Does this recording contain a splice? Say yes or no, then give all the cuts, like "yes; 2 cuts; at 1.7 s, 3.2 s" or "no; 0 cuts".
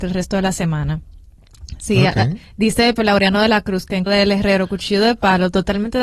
yes; 2 cuts; at 3.0 s, 4.1 s